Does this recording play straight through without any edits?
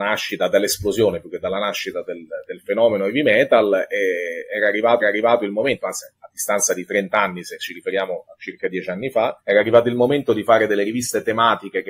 no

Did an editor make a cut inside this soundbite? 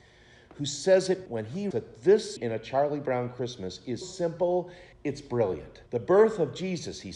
yes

